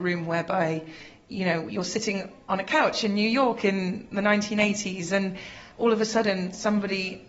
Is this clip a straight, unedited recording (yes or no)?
yes